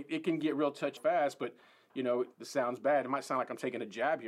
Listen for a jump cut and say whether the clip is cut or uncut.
cut